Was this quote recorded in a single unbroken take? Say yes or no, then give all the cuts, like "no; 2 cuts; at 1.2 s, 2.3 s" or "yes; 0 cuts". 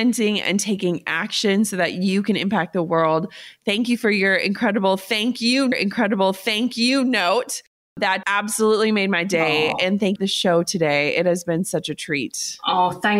no; 3 cuts; at 5.7 s, 8.2 s, 10.2 s